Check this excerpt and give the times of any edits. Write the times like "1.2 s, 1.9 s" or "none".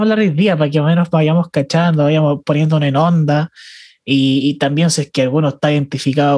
none